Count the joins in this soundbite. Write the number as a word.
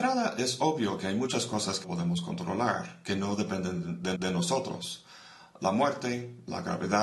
two